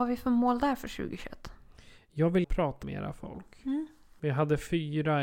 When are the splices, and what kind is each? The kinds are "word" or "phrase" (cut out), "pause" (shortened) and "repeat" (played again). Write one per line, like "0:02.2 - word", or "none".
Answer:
0:02.4 - word
0:02.8 - word